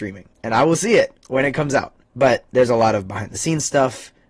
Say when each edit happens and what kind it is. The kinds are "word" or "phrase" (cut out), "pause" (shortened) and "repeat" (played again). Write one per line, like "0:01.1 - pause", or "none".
none